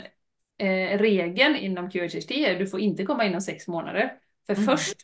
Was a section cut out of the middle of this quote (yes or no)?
yes